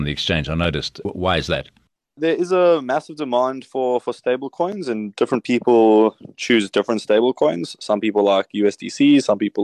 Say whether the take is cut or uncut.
uncut